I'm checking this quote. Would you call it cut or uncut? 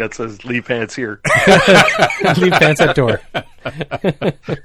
uncut